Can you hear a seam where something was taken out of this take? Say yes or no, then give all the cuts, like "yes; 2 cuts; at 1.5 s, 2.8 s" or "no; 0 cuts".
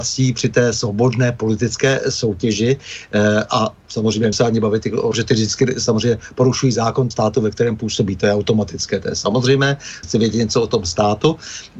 yes; 4 cuts; at 4.3 s, 5.1 s, 7.1 s, 10.0 s